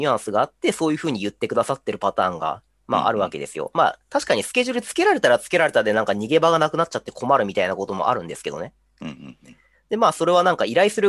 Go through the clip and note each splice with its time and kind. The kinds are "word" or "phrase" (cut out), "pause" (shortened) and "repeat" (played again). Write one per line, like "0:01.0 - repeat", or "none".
none